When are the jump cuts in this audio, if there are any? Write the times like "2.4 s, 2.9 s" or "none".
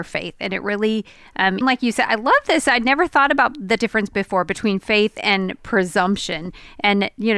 1.6 s